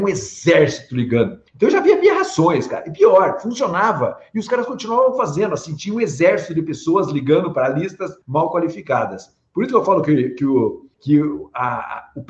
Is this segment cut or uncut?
cut